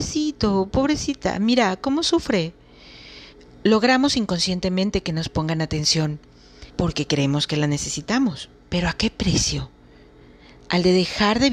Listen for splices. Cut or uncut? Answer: cut